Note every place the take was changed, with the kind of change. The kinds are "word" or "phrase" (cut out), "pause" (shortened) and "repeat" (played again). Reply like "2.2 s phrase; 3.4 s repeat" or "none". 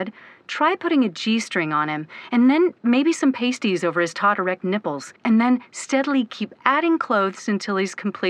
5.2 s pause